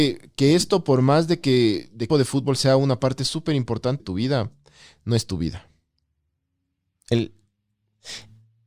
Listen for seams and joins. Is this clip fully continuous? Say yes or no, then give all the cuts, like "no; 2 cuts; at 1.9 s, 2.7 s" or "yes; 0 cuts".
no; 2 cuts; at 2.1 s, 4.0 s